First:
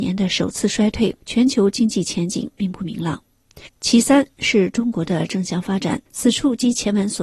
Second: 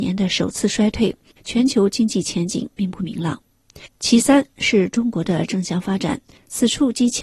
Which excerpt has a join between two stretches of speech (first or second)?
first